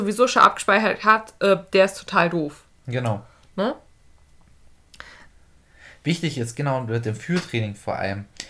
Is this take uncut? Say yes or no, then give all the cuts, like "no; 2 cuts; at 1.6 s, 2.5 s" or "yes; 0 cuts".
yes; 0 cuts